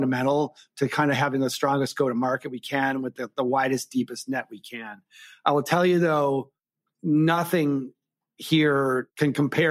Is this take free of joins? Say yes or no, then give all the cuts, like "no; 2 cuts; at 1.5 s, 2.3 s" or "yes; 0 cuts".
yes; 0 cuts